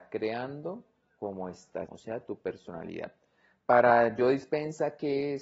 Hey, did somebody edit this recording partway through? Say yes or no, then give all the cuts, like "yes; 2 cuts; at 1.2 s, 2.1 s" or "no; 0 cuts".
yes; 1 cut; at 1.9 s